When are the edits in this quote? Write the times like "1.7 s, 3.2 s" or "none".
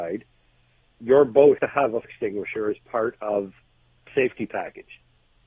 1.6 s, 2.0 s, 4.1 s